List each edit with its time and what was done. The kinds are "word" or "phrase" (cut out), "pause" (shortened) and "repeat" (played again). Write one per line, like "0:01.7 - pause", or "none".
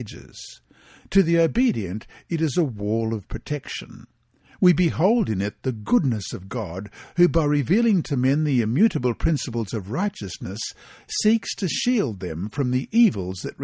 none